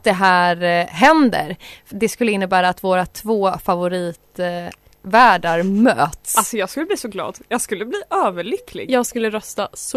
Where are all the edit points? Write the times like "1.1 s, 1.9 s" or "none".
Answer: 1.9 s